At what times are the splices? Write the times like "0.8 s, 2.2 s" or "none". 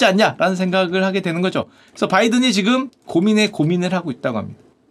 none